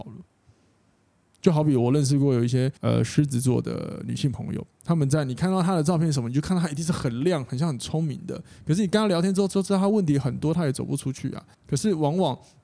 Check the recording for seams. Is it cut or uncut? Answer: cut